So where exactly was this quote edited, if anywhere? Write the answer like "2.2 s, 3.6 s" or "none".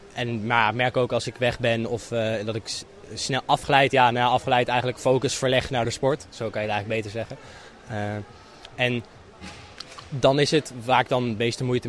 none